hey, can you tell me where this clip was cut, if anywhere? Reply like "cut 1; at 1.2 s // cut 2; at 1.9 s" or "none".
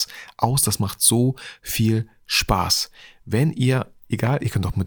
none